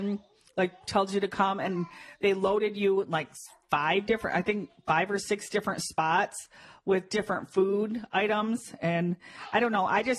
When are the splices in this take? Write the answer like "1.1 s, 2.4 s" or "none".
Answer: none